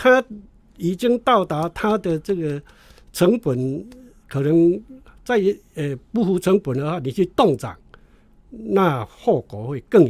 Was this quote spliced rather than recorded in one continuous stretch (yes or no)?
no